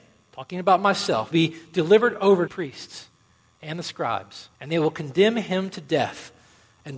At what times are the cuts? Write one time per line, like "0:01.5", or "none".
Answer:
0:01.3
0:02.5
0:04.5